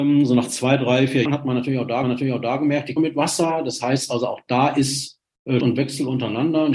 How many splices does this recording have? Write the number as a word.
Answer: four